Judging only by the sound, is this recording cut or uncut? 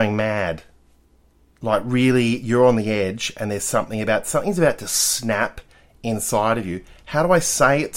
uncut